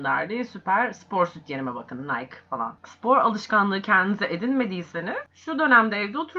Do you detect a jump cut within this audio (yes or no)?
no